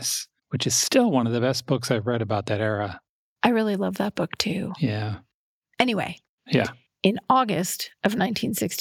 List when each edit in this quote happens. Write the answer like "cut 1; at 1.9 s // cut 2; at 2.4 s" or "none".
none